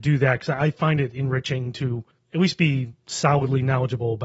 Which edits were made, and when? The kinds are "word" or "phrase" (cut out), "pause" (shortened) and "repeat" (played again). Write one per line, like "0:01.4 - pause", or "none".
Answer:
0:02.1 - pause